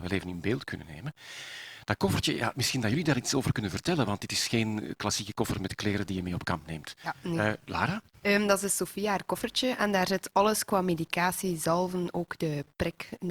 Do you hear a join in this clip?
no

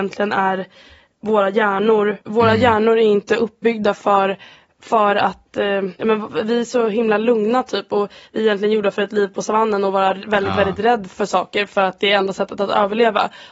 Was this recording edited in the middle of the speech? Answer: yes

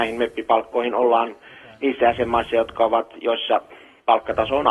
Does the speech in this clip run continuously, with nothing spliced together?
yes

